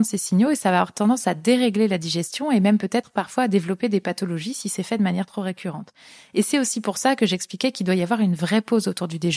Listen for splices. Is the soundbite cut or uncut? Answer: uncut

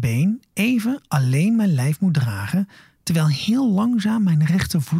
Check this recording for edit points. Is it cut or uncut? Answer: uncut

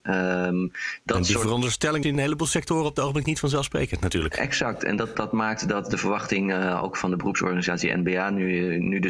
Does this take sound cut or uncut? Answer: cut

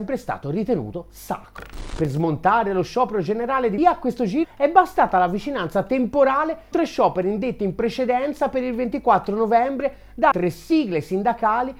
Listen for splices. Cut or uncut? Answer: cut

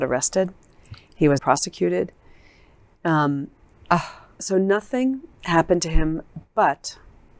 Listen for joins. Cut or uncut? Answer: cut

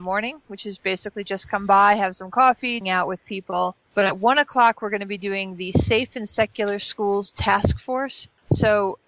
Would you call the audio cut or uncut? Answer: cut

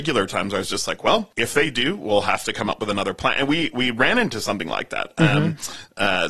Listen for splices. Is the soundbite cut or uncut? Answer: cut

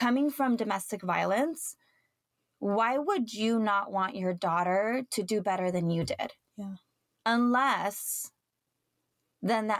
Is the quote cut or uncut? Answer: uncut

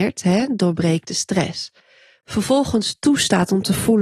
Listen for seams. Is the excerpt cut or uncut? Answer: uncut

